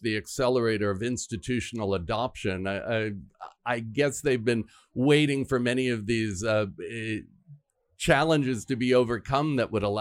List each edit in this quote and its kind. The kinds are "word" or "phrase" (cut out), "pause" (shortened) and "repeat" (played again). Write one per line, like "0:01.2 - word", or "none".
none